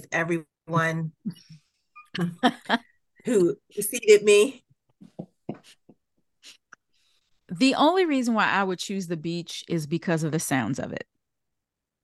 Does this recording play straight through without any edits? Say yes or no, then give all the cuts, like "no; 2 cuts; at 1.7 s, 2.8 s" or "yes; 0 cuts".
yes; 0 cuts